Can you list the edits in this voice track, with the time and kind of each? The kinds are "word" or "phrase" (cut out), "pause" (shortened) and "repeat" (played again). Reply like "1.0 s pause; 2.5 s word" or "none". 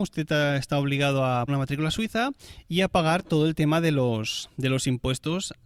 1.5 s word